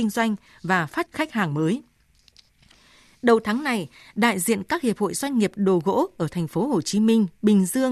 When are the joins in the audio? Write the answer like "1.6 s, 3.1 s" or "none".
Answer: 1.1 s